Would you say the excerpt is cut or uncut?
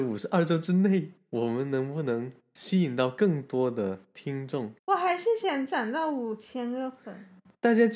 cut